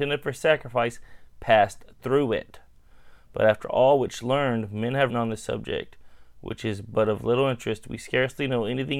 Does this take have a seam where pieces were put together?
yes; 1 cut; at 5.1 s

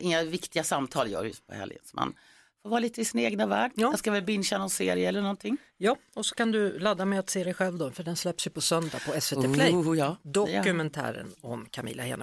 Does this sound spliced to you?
no; 0 cuts

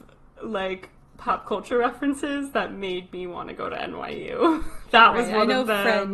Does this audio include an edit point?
no; 0 cuts

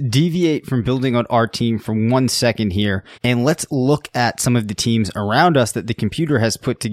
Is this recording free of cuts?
no; 1 cut; at 3.1 s

